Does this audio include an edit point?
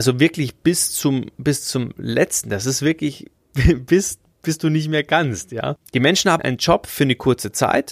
yes; 2 cuts; at 3.4 s, 6.4 s

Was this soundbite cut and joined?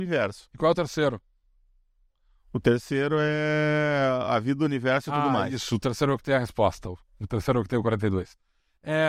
no; 0 cuts

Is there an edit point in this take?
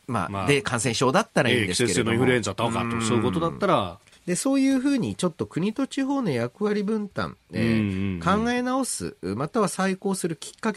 yes; 1 cut; at 4.1 s

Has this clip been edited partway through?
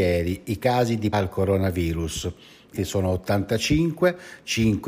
yes; 2 cuts; at 1.1 s, 2.8 s

